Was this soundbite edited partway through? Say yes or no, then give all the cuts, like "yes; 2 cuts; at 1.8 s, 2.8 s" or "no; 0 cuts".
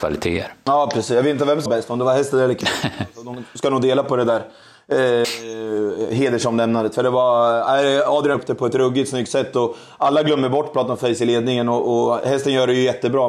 yes; 2 cuts; at 1.7 s, 8.3 s